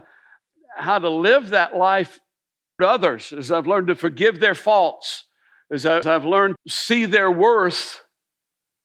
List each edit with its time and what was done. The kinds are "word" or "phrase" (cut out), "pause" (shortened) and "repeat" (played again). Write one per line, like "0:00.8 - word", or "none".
0:02.8 - word
0:06.0 - word
0:06.6 - word